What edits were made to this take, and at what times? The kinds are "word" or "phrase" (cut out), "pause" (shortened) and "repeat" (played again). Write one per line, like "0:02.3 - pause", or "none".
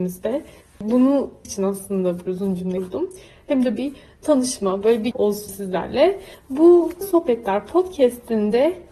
0:01.4 - word
0:02.3 - word
0:03.8 - word
0:05.1 - word
0:05.5 - word
0:07.0 - word